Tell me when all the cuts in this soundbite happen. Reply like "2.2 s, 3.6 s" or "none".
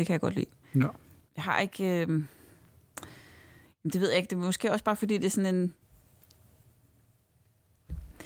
none